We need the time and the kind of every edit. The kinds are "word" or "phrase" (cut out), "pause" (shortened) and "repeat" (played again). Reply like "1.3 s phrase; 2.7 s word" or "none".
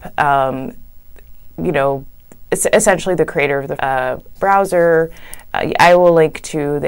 3.8 s word; 4.3 s word